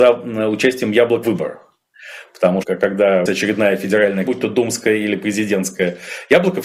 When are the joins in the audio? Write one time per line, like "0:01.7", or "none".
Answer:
0:01.2
0:02.6
0:03.3
0:04.3

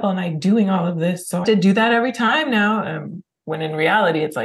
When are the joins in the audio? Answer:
0:01.4

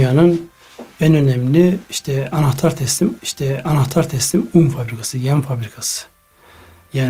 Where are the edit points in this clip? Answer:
0:03.2

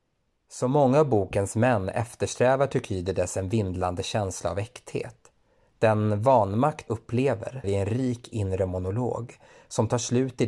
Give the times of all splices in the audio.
0:06.9
0:07.6

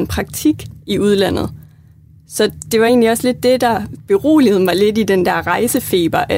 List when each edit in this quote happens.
none

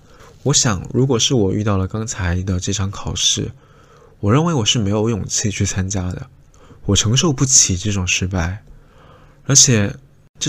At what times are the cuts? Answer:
none

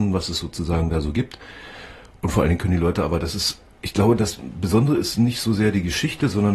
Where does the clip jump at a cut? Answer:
none

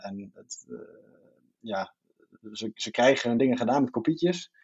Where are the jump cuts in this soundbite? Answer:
none

